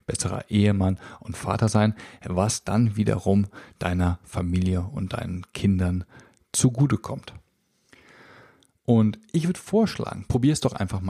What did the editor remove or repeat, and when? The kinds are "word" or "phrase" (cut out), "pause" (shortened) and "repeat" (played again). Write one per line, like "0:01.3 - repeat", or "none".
none